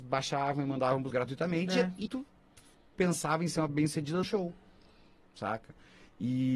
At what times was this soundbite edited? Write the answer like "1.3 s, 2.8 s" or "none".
1.1 s, 2.1 s, 3.7 s, 4.2 s

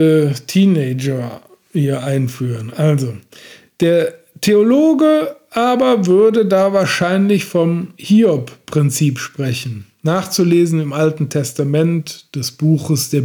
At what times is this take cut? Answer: none

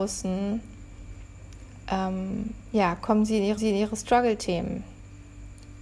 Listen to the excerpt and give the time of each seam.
3.6 s

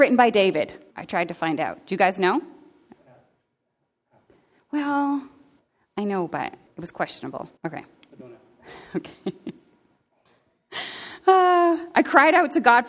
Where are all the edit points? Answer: 0.9 s, 5.6 s, 6.7 s, 7.6 s

